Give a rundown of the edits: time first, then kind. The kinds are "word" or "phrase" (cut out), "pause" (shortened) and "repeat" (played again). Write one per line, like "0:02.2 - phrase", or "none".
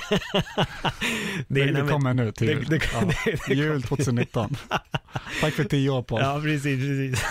none

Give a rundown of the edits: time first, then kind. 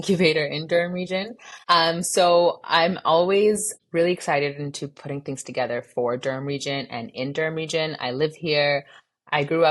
0:01.6 - pause

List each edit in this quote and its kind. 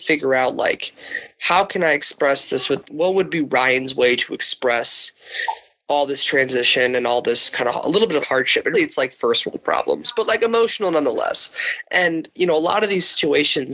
0:02.9 - word
0:08.2 - word
0:08.7 - word

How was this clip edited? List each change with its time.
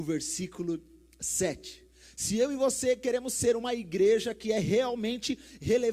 none

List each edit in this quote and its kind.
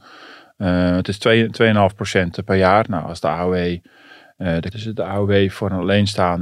0:04.7 - phrase

